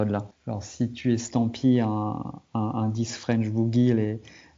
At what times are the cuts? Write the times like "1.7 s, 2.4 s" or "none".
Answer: 2.4 s

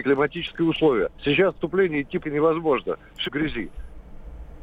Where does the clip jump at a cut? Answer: 1.2 s, 1.5 s, 2.2 s, 3.2 s

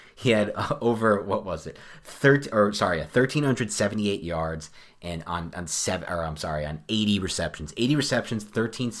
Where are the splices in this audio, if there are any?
none

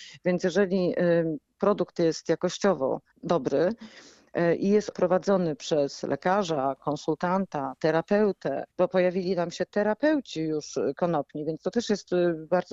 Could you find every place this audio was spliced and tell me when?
3.1 s, 4.9 s, 8.7 s

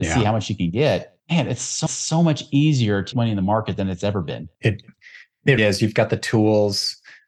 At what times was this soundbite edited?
1.2 s, 1.9 s, 3.1 s, 4.5 s, 5.6 s

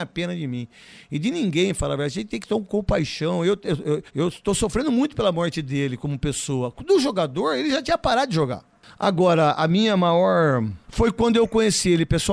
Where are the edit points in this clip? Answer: 4.1 s, 10.8 s

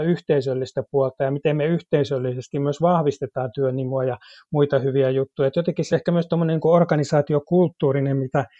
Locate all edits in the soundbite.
5.9 s

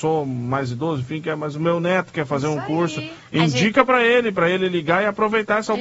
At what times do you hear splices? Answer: none

